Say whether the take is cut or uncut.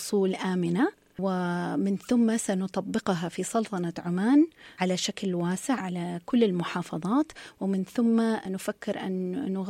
uncut